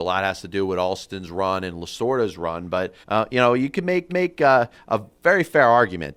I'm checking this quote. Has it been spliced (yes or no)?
yes